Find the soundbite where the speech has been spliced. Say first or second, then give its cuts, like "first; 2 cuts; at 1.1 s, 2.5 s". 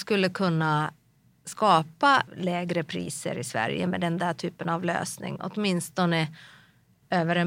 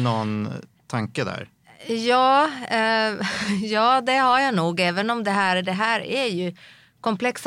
first; 1 cut; at 2.3 s